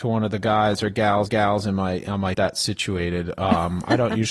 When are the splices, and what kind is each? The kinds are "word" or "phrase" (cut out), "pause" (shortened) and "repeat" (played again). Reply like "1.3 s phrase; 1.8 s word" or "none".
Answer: 1.3 s repeat; 2.3 s phrase